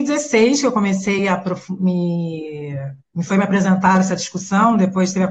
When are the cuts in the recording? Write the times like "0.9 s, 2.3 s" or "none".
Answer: none